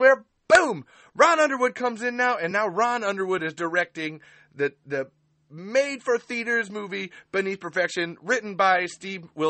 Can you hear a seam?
no; 0 cuts

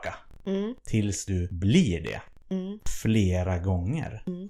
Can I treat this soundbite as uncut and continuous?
yes; 0 cuts

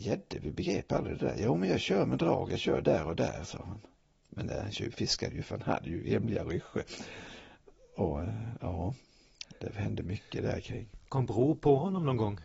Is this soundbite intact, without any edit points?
yes; 0 cuts

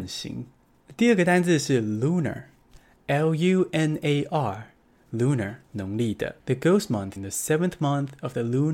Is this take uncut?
no; 3 cuts; at 5.6 s, 6.4 s, 7.2 s

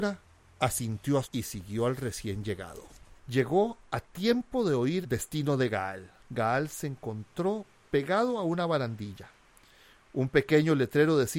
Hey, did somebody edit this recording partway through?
yes; 4 cuts; at 1.2 s, 3.2 s, 5.0 s, 6.2 s

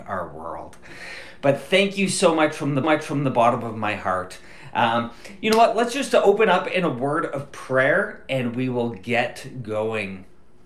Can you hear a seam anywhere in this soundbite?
yes; 1 cut; at 2.8 s

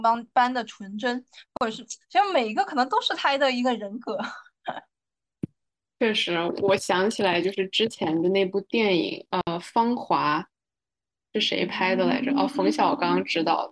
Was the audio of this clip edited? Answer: no; 0 cuts

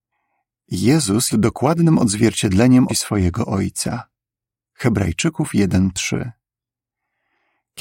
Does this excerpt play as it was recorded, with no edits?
no; 2 cuts; at 1.3 s, 2.9 s

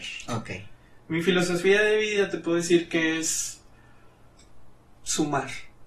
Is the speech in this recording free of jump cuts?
yes; 0 cuts

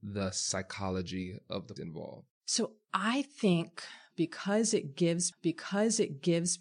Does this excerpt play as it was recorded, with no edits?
no; 2 cuts; at 1.8 s, 5.3 s

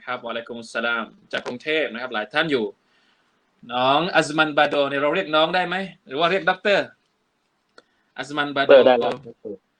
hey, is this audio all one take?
yes; 0 cuts

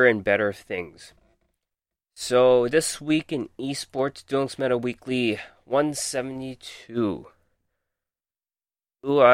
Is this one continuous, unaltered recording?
yes; 0 cuts

